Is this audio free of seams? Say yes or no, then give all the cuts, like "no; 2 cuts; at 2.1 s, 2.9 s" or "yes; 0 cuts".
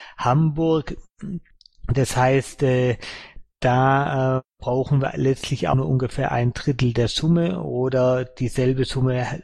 yes; 0 cuts